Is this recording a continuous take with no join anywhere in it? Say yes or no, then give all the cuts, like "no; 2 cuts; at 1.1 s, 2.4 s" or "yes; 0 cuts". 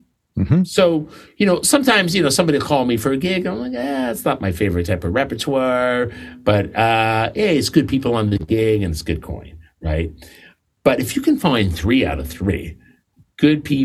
yes; 0 cuts